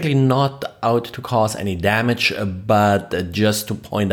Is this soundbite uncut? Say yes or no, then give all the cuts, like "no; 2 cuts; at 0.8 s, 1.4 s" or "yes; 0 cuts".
yes; 0 cuts